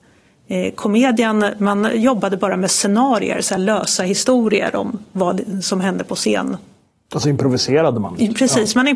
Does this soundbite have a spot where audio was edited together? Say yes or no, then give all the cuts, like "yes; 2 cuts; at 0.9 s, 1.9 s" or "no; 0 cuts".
no; 0 cuts